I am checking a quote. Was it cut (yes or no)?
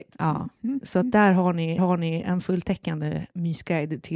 yes